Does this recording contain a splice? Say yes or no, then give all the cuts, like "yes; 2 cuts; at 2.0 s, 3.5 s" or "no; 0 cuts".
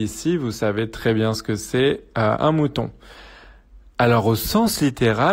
no; 0 cuts